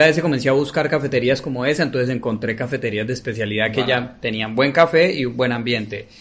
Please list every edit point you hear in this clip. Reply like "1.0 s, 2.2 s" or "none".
none